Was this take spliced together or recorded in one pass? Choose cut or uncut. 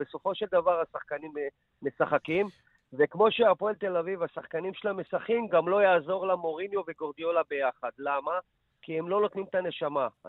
uncut